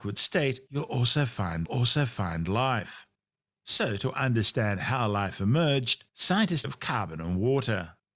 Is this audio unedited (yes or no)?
no